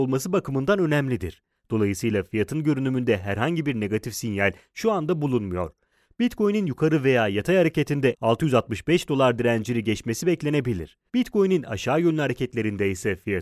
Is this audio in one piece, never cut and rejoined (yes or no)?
no